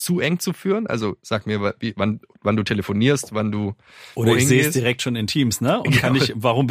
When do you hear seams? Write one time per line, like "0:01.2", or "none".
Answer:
none